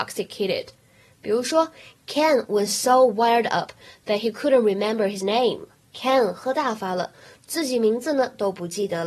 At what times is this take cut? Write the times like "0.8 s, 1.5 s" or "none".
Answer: none